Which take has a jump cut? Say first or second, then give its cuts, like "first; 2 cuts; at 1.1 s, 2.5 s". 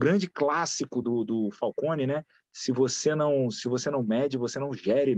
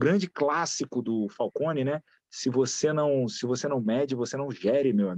second; 1 cut; at 1.0 s